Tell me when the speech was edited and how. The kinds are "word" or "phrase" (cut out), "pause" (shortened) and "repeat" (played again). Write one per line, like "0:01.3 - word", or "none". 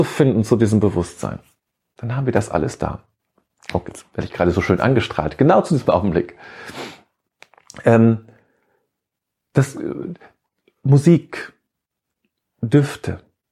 none